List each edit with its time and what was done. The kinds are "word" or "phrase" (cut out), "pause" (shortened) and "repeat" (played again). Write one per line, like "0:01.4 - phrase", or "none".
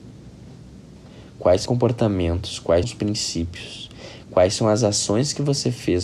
0:01.7 - word
0:02.8 - word